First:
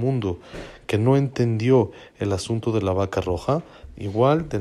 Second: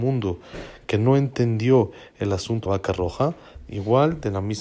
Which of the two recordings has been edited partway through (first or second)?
second